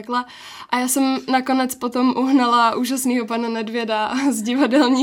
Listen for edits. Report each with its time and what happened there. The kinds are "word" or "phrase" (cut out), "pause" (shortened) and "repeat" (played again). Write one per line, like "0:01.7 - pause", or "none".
none